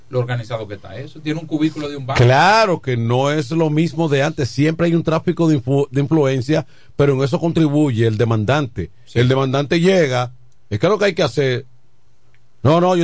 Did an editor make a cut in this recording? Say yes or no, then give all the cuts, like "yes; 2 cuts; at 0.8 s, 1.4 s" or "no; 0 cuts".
no; 0 cuts